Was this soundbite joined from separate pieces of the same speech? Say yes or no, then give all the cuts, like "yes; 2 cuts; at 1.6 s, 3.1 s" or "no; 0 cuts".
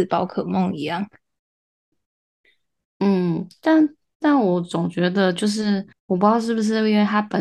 yes; 1 cut; at 5.9 s